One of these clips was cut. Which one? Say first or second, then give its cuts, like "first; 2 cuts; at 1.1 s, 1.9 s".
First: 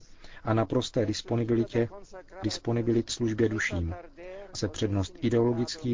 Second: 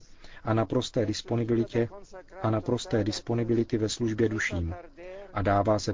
first; 3 cuts; at 2.4 s, 3.1 s, 4.5 s